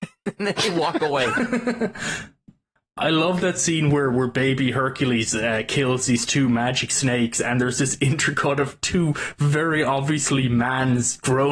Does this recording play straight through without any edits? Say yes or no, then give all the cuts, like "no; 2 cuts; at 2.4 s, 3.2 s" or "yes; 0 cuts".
yes; 0 cuts